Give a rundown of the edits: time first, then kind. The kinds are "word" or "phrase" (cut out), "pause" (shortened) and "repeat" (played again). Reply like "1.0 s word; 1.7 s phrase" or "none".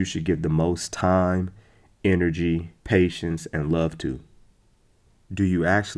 2.8 s pause